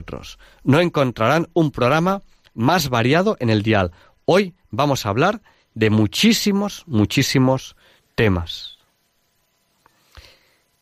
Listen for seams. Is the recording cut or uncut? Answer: uncut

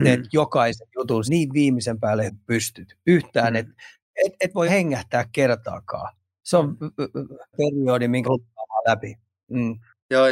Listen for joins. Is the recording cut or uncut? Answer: cut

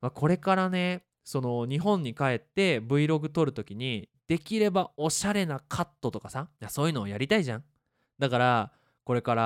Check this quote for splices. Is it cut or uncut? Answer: cut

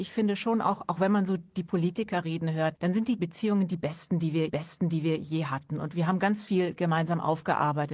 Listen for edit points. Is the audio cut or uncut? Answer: cut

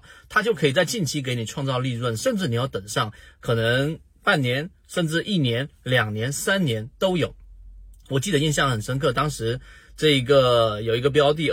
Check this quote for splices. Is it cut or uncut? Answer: uncut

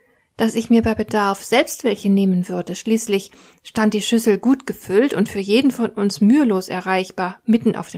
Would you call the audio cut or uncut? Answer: uncut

